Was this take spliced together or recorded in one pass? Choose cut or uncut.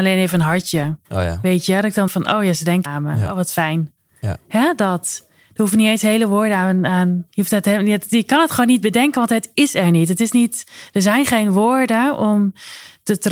cut